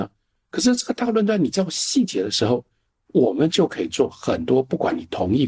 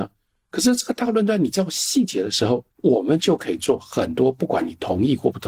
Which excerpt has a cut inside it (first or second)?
second